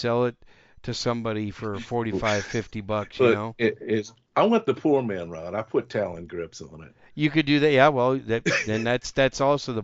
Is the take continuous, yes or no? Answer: yes